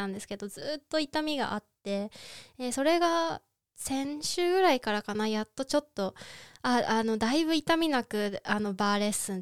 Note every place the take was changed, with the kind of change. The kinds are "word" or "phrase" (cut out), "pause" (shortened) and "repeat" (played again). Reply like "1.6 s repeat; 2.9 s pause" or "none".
none